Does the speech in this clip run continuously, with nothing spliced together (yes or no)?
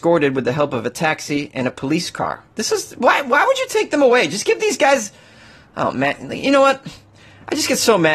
no